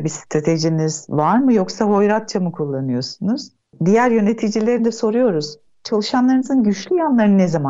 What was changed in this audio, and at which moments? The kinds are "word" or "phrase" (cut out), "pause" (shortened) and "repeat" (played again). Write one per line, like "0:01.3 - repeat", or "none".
none